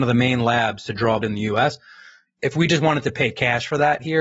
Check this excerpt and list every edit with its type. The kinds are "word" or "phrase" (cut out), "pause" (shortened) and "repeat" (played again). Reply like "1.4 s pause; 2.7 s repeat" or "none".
1.2 s word